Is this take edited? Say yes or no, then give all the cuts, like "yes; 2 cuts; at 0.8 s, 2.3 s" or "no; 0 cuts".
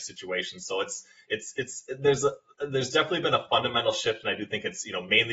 no; 0 cuts